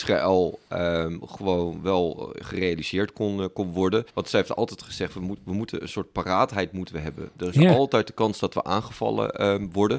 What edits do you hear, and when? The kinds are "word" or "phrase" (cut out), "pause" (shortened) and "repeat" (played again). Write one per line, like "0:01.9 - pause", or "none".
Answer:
0:04.1 - pause